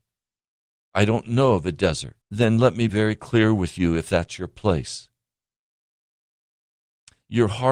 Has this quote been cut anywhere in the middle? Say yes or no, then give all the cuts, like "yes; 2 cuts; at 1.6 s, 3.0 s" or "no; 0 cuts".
yes; 2 cuts; at 2.2 s, 2.9 s